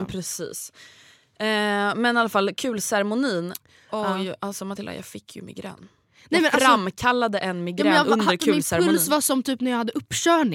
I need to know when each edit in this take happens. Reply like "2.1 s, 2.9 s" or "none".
none